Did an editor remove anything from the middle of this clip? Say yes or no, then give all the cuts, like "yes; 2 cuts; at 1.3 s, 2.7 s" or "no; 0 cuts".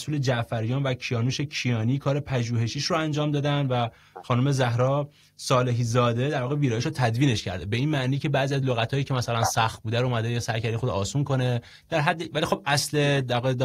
no; 0 cuts